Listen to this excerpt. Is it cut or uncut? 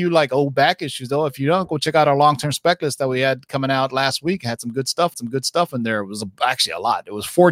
cut